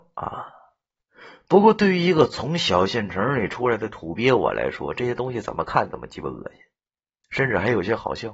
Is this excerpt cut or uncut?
uncut